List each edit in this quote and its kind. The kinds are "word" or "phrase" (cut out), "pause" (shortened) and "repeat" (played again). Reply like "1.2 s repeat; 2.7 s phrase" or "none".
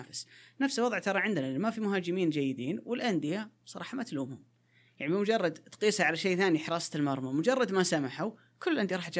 none